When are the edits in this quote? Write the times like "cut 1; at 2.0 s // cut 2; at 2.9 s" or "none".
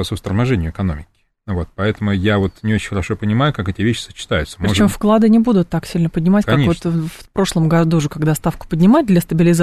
none